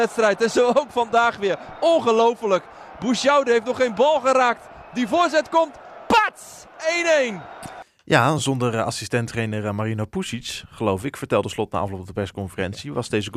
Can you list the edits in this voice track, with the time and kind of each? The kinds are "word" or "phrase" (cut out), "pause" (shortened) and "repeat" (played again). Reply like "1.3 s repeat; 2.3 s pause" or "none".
none